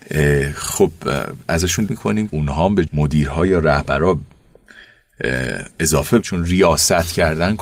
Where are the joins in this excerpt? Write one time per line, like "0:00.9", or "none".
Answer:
0:01.9
0:02.3
0:02.9
0:06.2